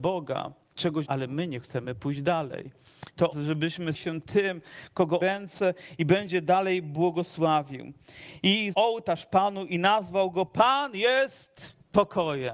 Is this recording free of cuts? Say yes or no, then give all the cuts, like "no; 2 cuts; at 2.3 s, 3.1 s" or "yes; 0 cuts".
no; 5 cuts; at 1.0 s, 3.3 s, 3.9 s, 5.2 s, 8.7 s